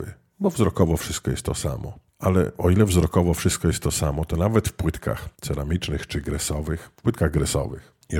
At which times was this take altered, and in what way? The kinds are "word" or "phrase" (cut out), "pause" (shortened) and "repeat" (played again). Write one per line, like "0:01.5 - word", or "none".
0:02.1 - pause
0:05.3 - pause